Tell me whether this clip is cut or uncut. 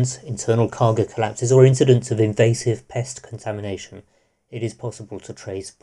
uncut